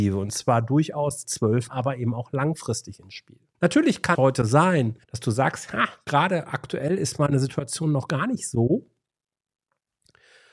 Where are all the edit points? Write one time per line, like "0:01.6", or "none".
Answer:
0:01.2
0:01.7
0:03.5
0:04.1
0:05.0

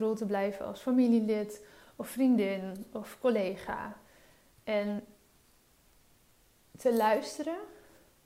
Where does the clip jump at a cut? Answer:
none

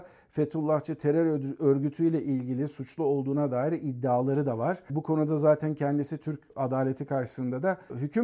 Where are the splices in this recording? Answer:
none

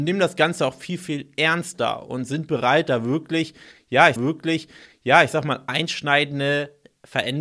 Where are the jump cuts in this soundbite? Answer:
0:04.2

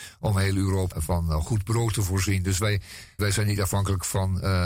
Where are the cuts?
0:00.9
0:03.2

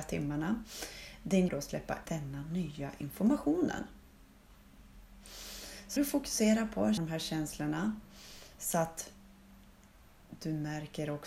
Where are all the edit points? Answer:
0:01.5
0:02.1
0:06.0
0:07.0

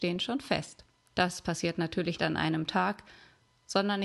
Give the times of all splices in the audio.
0:00.9
0:02.2

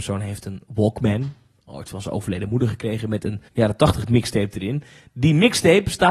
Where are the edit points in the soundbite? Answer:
0:03.5

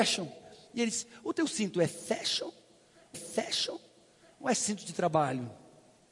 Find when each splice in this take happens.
0:03.1

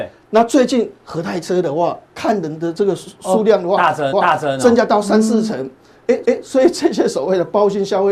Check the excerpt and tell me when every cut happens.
0:04.1
0:06.2

